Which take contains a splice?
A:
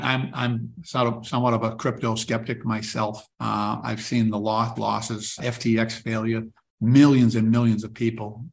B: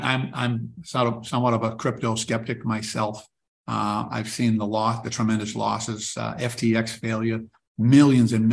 A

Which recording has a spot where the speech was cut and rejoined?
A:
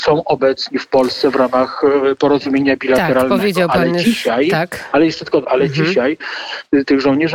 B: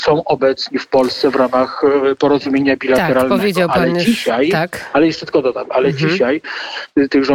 A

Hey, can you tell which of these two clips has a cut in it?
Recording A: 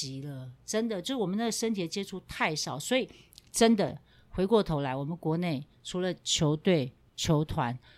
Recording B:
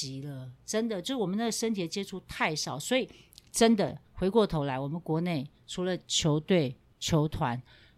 B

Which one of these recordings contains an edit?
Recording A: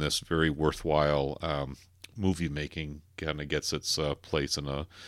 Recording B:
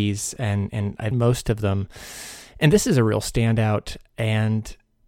B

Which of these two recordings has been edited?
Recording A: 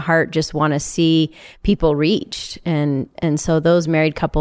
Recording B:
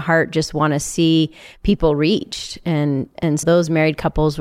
B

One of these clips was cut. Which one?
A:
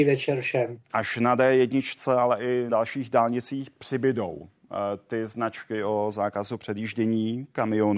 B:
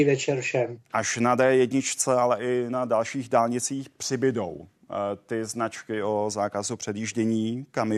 A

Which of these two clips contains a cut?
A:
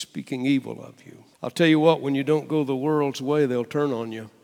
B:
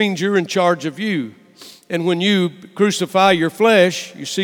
A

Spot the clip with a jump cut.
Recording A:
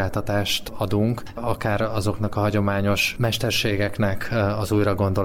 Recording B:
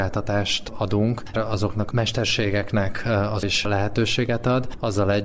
B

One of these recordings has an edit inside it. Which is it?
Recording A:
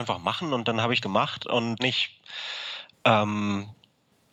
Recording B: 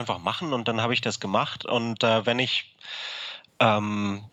A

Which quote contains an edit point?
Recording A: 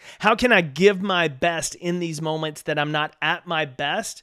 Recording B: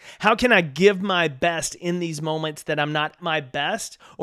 B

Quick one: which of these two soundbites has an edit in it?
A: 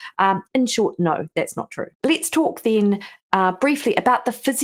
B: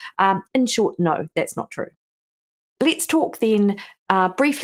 A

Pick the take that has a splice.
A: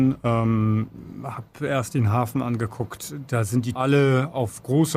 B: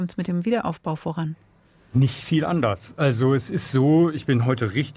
A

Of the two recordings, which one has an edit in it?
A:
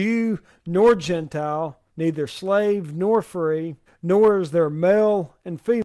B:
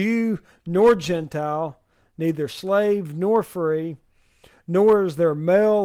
A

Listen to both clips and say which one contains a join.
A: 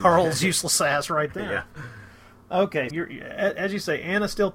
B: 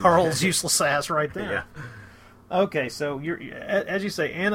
A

